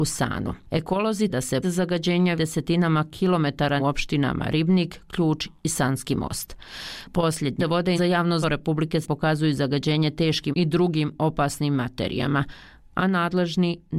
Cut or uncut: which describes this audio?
cut